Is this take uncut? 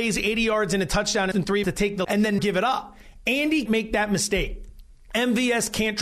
no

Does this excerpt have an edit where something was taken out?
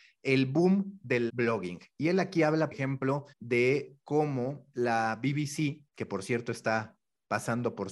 yes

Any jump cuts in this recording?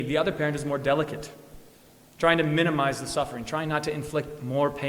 no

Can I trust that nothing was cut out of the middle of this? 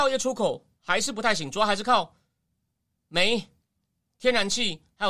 yes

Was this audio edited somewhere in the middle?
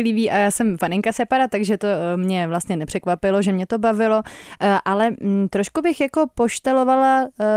no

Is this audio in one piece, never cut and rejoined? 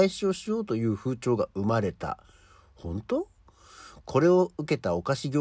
yes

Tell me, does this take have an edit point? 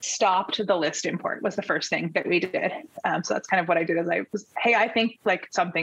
no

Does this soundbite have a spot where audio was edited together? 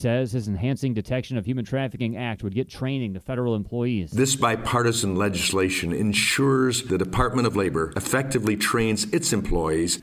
no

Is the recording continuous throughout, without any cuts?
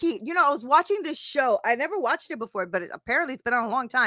yes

